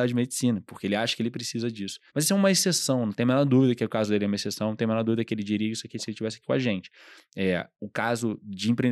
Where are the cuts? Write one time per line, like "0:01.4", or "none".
0:02.1